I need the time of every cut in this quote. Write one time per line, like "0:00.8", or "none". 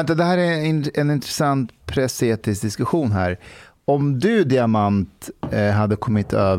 none